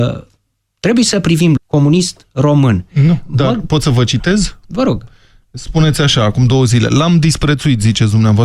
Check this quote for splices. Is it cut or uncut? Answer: cut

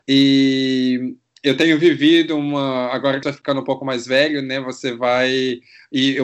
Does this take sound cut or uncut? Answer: cut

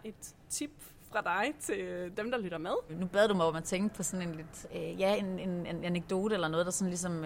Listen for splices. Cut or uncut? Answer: cut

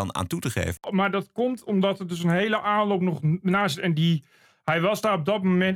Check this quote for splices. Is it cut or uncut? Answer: uncut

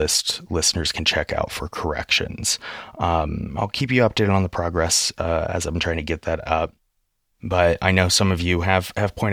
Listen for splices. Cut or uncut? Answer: uncut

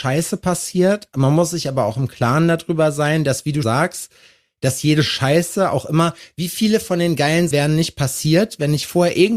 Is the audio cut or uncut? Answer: cut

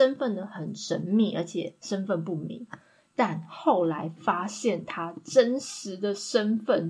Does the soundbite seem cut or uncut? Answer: uncut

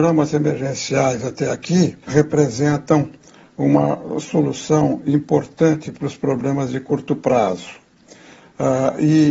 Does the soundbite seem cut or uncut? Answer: cut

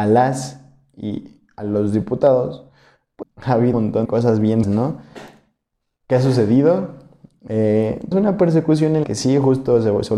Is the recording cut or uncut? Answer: cut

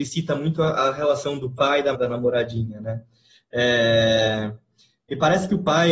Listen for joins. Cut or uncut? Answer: cut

